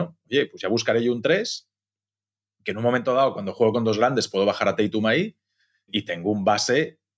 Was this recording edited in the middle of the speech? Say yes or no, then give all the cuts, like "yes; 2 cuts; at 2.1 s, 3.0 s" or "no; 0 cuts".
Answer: no; 0 cuts